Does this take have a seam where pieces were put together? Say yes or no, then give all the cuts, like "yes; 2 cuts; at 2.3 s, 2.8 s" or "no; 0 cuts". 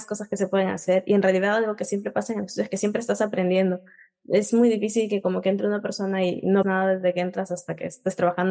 yes; 1 cut; at 6.6 s